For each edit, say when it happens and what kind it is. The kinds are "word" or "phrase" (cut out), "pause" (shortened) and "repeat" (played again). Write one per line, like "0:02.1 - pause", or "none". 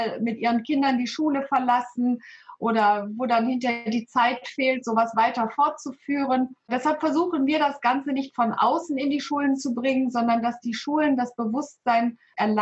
none

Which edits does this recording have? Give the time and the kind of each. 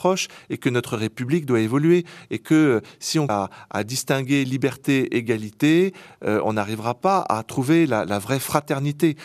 0:03.3 - word

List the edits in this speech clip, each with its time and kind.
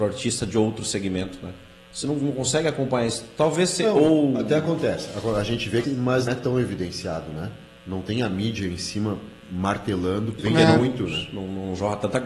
0:05.8 - word
0:06.3 - word
0:10.4 - word

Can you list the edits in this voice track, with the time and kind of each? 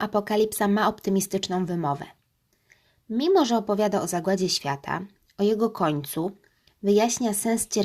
none

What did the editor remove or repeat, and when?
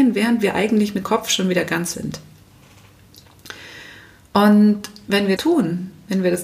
0:01.0 - word
0:01.9 - word
0:05.4 - word

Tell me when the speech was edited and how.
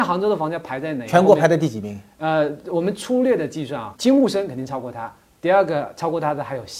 0:04.0 - word

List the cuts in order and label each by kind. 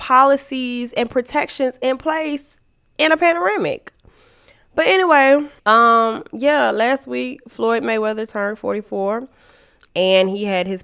0:05.6 - pause

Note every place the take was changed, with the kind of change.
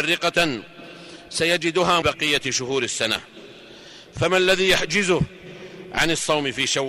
0:02.0 - phrase

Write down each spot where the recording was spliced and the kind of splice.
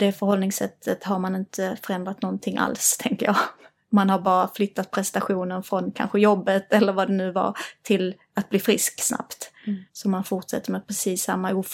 0:09.9 - pause

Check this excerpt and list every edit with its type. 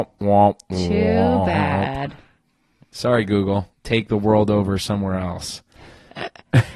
0:03.7 - pause

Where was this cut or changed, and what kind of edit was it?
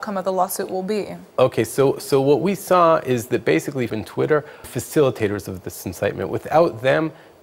0:03.9 - phrase
0:04.6 - phrase

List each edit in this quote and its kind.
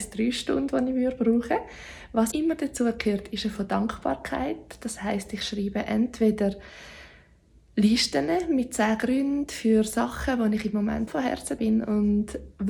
0:02.3 - word
0:03.5 - word
0:11.1 - word
0:11.6 - word

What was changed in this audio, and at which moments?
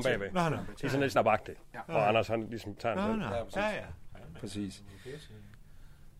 0:01.1 - word
0:02.8 - word

